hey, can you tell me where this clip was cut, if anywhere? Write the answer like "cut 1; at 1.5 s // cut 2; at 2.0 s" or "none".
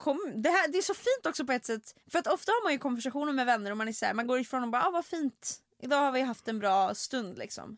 cut 1; at 2.0 s

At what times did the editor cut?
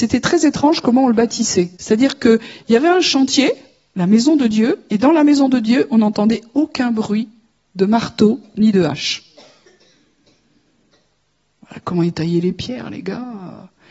cut 1; at 1.8 s

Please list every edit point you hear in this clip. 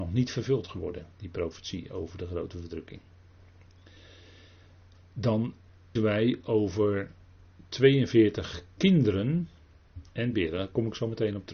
cut 1; at 6.0 s // cut 2; at 10.3 s

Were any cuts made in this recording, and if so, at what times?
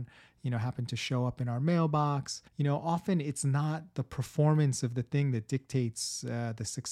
cut 1; at 2.5 s

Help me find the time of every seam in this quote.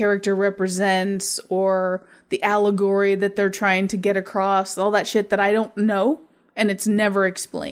none

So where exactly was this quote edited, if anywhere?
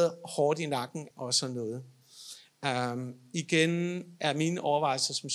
cut 1; at 1.1 s

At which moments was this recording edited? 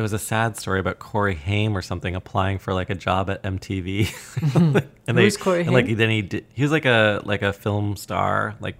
cut 1; at 6.5 s

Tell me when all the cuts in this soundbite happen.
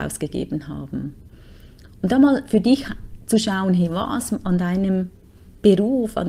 none

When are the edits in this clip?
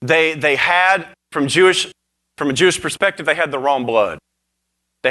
none

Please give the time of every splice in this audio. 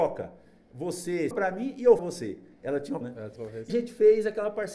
cut 1; at 1.3 s // cut 2; at 2.0 s // cut 3; at 3.0 s // cut 4; at 3.4 s // cut 5; at 3.7 s

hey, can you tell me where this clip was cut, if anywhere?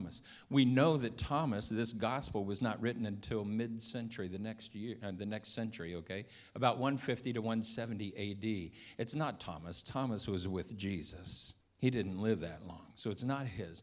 cut 1; at 11.6 s

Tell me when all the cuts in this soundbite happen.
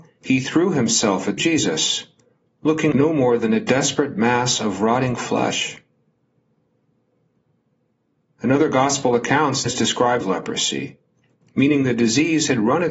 cut 1; at 1.4 s // cut 2; at 2.9 s // cut 3; at 9.7 s // cut 4; at 10.2 s

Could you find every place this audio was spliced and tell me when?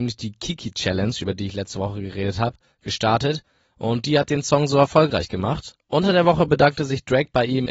none

